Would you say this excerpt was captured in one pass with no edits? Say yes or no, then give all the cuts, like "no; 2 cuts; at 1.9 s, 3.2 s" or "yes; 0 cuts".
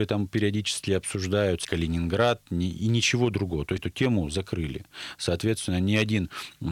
no; 2 cuts; at 1.6 s, 3.8 s